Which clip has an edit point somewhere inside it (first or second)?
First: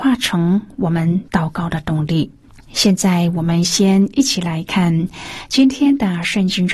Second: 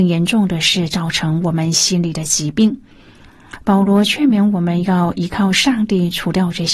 first